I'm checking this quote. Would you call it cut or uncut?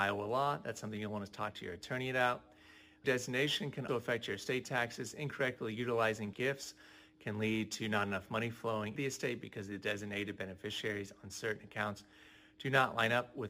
cut